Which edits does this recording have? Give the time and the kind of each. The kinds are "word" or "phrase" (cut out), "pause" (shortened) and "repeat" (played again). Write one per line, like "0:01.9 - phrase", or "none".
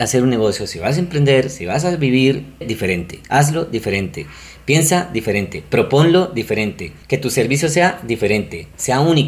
0:02.6 - word
0:03.2 - pause
0:07.0 - pause